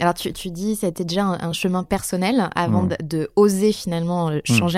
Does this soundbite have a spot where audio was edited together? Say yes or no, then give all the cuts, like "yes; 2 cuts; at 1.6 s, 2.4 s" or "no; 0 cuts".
no; 0 cuts